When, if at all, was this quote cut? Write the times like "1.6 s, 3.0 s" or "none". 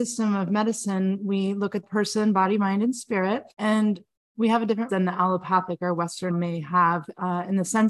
1.8 s, 3.5 s, 4.9 s, 6.3 s